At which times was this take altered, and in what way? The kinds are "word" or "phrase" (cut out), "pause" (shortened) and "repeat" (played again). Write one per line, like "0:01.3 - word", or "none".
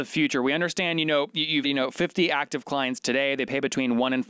0:01.6 - word